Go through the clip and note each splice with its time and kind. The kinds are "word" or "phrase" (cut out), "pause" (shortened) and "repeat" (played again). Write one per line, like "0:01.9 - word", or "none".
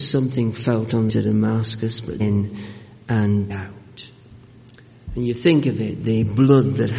0:01.1 - word
0:02.2 - word
0:03.5 - word